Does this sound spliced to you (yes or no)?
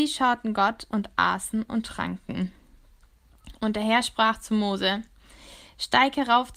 no